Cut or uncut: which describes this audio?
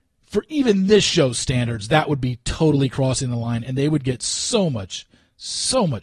uncut